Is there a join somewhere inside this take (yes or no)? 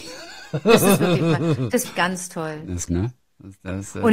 yes